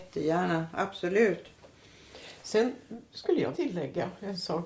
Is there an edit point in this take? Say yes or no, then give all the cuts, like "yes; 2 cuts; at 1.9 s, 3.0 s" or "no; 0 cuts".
yes; 1 cut; at 3.5 s